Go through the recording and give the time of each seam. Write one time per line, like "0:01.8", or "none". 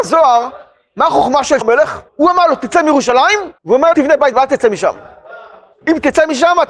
0:01.6
0:02.1
0:03.6
0:03.9
0:04.3